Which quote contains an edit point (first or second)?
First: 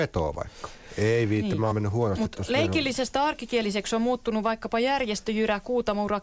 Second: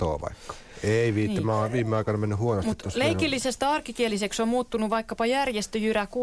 first